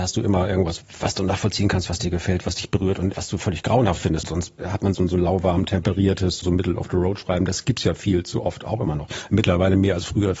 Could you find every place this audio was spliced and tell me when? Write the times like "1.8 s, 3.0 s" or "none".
3.1 s, 4.9 s